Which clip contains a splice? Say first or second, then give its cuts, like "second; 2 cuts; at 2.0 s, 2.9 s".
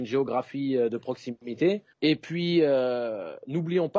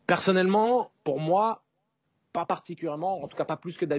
first; 1 cut; at 1.9 s